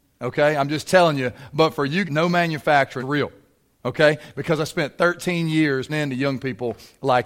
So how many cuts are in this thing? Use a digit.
3